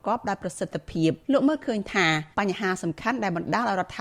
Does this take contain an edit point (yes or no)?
yes